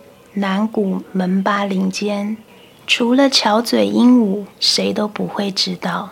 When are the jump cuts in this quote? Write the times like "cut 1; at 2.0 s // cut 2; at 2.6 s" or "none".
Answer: cut 1; at 4.5 s

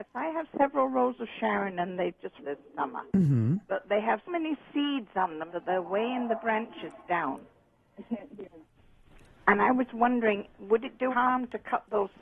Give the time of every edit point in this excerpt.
cut 1; at 2.4 s // cut 2; at 3.1 s // cut 3; at 4.3 s // cut 4; at 5.5 s // cut 5; at 9.9 s // cut 6; at 11.1 s

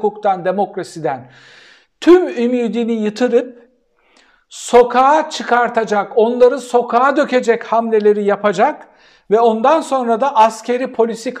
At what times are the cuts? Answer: none

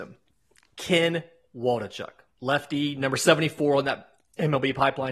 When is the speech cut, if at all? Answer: none

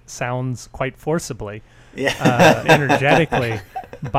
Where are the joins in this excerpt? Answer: cut 1; at 2.6 s

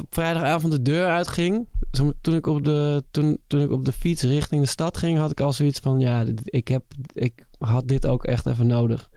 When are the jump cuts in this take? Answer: none

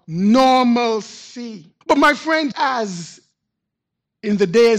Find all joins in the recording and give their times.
cut 1; at 1.8 s // cut 2; at 2.5 s

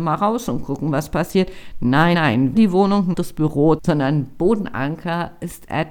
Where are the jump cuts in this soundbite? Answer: cut 1; at 2.1 s // cut 2; at 2.5 s // cut 3; at 3.1 s // cut 4; at 3.8 s

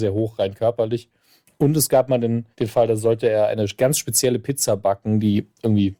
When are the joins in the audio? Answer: cut 1; at 2.5 s

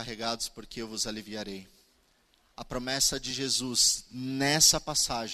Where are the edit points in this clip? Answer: none

